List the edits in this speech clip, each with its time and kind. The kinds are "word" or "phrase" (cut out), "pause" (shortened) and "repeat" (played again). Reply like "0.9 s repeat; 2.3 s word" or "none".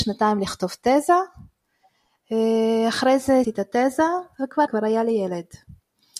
3.4 s word; 4.7 s word